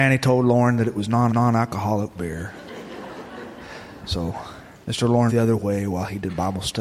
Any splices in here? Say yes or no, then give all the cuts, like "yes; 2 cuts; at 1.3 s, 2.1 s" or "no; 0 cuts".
yes; 3 cuts; at 1.3 s, 4.8 s, 5.3 s